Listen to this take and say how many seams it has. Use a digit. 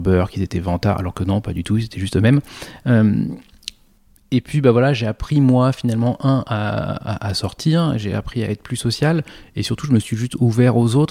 0